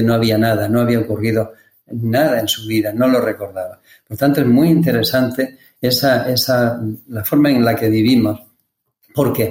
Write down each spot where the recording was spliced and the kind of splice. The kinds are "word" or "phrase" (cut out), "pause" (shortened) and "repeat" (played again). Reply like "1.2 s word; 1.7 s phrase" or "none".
none